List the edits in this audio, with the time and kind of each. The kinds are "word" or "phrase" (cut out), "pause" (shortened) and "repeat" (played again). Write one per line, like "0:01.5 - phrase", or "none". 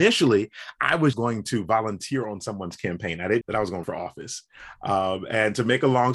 0:01.1 - word
0:03.4 - word
0:03.8 - word